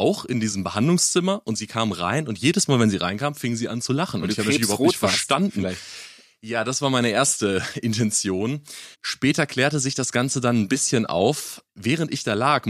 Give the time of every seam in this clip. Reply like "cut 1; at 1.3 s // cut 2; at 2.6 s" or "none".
cut 1; at 8.9 s